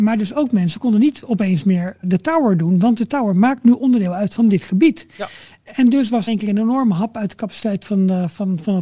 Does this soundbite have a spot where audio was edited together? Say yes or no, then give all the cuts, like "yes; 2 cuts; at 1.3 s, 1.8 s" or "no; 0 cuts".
yes; 2 cuts; at 2.0 s, 6.3 s